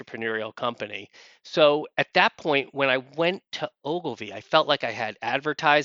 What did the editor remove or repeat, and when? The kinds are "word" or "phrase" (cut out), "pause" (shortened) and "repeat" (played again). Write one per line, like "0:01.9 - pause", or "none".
none